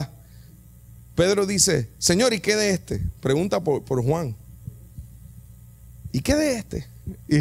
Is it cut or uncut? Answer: uncut